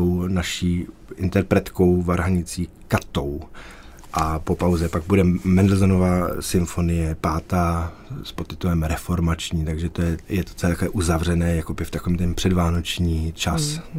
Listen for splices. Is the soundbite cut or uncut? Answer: uncut